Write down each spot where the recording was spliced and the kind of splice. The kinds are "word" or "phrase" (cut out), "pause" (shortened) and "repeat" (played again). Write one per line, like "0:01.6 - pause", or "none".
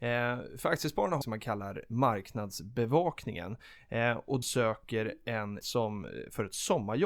0:01.2 - phrase
0:04.4 - word
0:05.6 - word